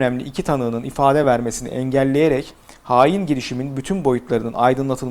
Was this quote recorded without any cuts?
yes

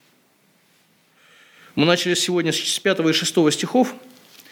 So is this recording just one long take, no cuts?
yes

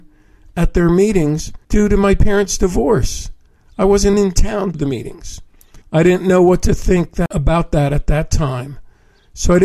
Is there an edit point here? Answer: yes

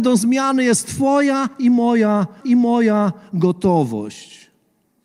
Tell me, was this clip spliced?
yes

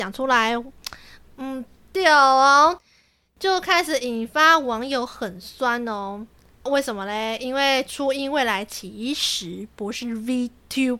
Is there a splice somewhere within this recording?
no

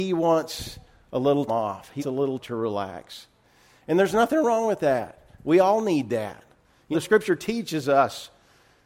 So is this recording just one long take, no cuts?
no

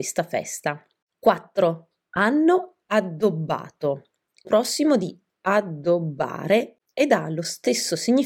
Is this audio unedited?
no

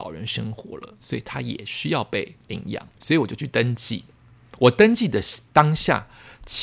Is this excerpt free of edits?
no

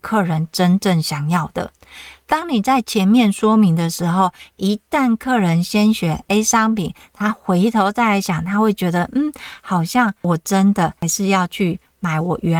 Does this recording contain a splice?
no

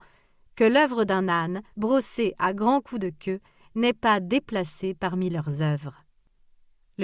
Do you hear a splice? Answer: yes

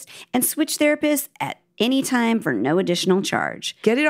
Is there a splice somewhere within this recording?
no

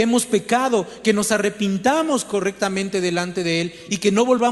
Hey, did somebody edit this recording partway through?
no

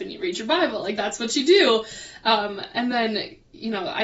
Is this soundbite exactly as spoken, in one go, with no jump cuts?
yes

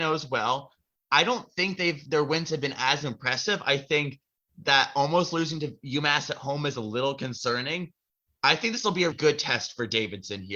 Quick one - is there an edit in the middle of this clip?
yes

